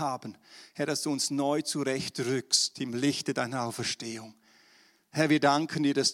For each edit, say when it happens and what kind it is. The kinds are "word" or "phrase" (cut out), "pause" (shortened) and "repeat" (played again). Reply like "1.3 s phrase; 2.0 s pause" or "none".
none